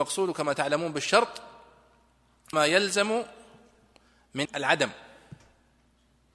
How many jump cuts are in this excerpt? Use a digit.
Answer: 2